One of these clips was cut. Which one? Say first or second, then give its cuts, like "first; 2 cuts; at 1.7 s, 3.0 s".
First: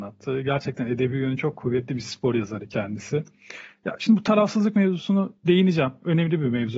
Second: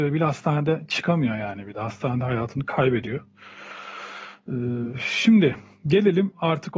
first; 1 cut; at 5.4 s